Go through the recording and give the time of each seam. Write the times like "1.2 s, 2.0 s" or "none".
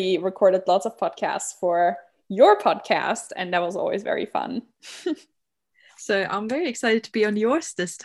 none